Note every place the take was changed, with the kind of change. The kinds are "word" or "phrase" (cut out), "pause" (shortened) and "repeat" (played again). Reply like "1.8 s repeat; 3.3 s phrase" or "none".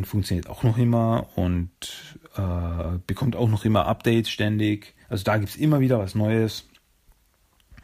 5.0 s pause